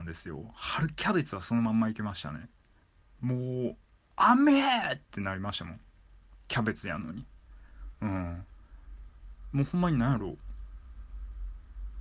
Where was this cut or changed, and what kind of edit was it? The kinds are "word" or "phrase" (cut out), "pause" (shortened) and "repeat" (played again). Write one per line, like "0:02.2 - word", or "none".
0:02.8 - pause
0:03.8 - pause